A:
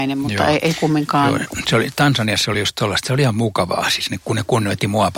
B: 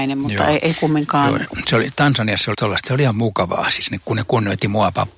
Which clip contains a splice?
B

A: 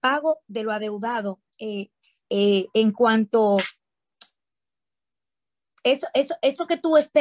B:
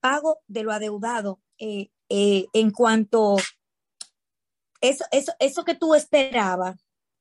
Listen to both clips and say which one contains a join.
B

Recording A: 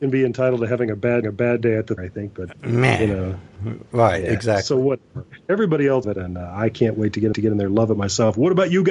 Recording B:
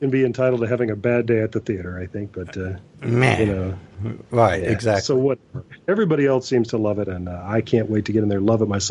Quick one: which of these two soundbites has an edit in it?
A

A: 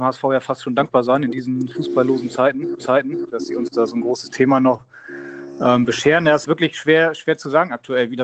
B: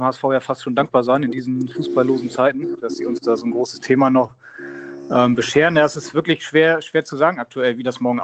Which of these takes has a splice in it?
A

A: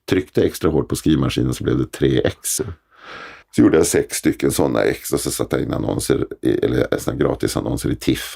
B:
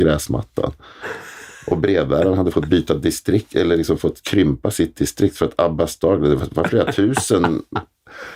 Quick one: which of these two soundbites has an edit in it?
A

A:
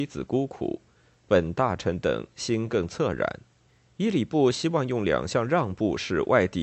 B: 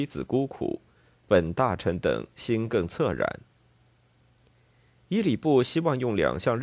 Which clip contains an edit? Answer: A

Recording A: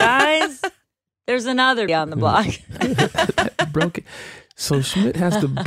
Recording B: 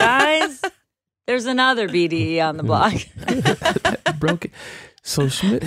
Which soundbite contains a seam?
A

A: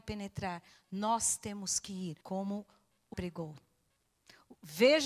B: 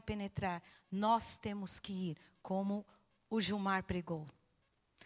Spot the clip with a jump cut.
A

